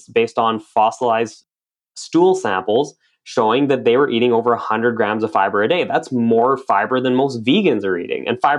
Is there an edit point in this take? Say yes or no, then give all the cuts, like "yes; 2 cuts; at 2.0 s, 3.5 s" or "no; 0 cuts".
no; 0 cuts